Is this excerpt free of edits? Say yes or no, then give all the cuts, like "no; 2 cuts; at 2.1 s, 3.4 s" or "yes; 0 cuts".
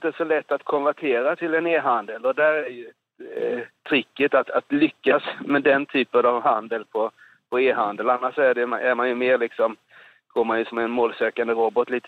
yes; 0 cuts